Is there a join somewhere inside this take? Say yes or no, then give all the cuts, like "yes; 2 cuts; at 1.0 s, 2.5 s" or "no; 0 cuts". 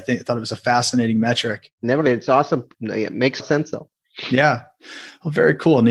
yes; 2 cuts; at 2.0 s, 3.4 s